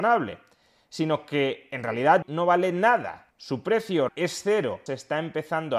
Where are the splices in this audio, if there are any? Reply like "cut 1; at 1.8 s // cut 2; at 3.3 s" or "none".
cut 1; at 2.2 s // cut 2; at 3.3 s // cut 3; at 4.1 s // cut 4; at 4.9 s